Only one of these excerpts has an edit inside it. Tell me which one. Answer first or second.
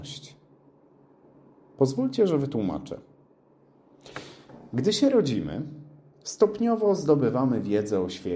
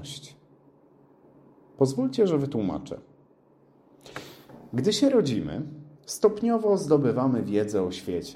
second